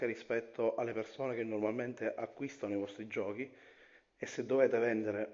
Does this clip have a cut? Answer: no; 0 cuts

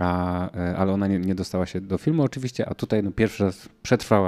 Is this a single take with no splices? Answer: no; 1 cut; at 2.7 s

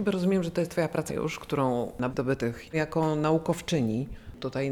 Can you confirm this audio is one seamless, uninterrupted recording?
no; 3 cuts; at 1.1 s, 2.1 s, 2.7 s

